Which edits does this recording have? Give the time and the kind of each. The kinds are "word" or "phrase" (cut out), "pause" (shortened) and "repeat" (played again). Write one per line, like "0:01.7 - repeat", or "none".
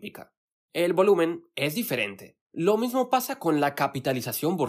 0:02.4 - pause